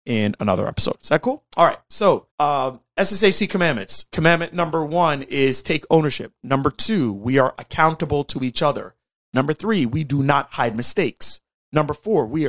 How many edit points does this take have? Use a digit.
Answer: 1